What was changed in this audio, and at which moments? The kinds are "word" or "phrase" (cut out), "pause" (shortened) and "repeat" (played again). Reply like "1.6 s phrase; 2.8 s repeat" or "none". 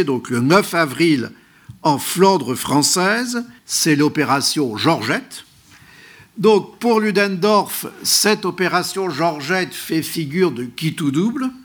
3.6 s pause